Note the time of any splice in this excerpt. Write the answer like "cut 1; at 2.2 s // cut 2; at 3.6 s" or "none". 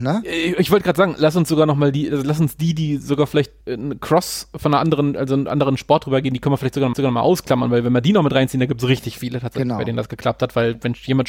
cut 1; at 3.6 s // cut 2; at 6.9 s

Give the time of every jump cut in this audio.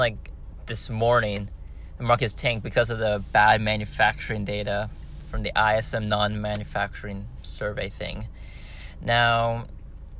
none

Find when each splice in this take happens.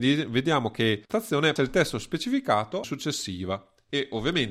cut 1; at 1.1 s // cut 2; at 1.6 s // cut 3; at 2.8 s

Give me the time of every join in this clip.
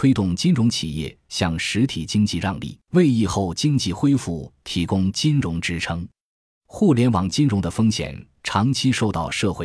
cut 1; at 2.8 s

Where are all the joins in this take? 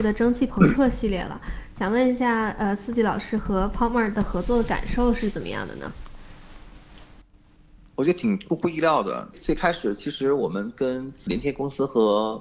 none

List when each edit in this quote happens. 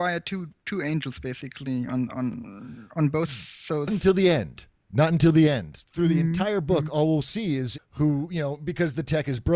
cut 1; at 3.9 s // cut 2; at 7.8 s

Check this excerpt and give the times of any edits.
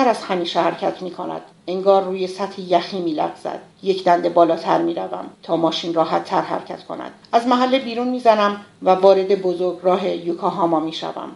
cut 1; at 1.5 s // cut 2; at 3.7 s // cut 3; at 5.3 s // cut 4; at 7.2 s

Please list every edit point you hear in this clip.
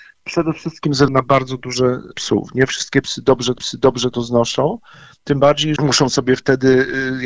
cut 1; at 1.1 s // cut 2; at 2.1 s // cut 3; at 3.6 s // cut 4; at 5.8 s

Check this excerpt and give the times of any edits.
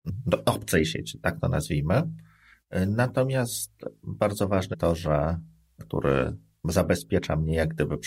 cut 1; at 4.7 s // cut 2; at 5.8 s

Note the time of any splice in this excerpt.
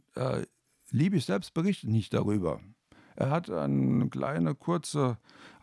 none

